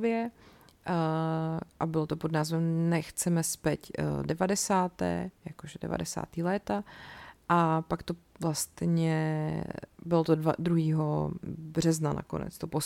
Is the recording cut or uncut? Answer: uncut